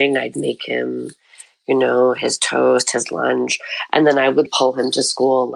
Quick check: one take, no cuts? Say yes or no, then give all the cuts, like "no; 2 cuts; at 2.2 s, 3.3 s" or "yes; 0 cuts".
no; 1 cut; at 4.5 s